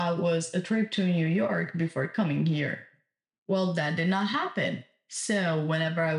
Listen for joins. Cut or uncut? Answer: uncut